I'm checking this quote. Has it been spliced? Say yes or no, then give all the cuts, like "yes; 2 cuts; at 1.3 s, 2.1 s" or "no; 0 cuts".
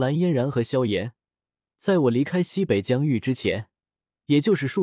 no; 0 cuts